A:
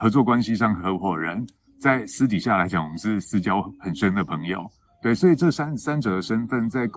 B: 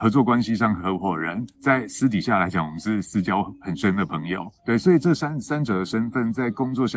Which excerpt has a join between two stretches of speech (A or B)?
B